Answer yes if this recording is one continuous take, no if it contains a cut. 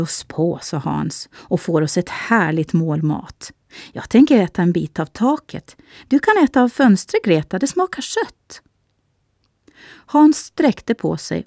yes